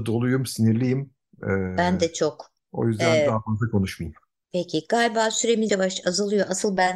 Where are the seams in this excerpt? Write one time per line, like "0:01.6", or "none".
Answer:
0:05.7

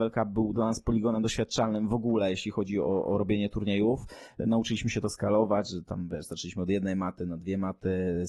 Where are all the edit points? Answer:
0:03.0

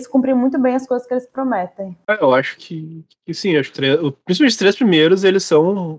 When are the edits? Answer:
0:02.6
0:03.7

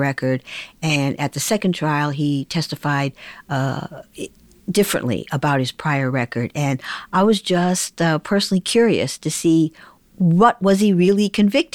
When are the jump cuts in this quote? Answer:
none

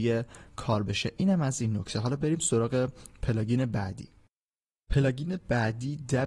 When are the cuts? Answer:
none

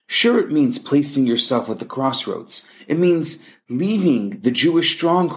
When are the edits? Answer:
none

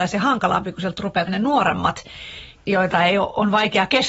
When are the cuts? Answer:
0:01.3

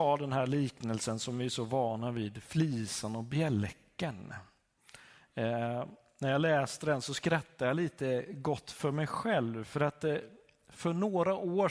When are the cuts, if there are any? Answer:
none

